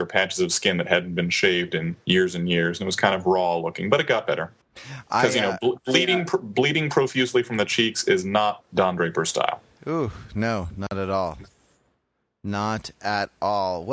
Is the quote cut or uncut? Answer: cut